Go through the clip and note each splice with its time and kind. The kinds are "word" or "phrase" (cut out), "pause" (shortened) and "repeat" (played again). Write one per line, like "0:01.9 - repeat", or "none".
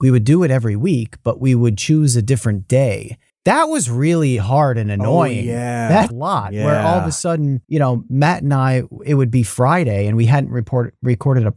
0:06.1 - phrase
0:07.6 - pause